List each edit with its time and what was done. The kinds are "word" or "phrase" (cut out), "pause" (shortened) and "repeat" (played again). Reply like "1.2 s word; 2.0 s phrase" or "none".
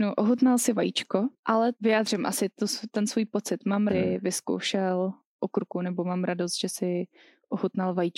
1.7 s phrase; 3.9 s phrase; 5.2 s word